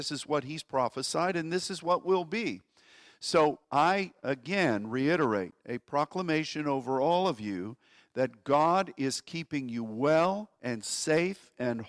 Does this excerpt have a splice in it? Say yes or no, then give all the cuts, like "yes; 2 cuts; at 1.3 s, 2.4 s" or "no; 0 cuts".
yes; 1 cut; at 3.6 s